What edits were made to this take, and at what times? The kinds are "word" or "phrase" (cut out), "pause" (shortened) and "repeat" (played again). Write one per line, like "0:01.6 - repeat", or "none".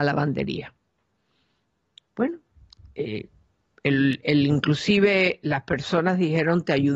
none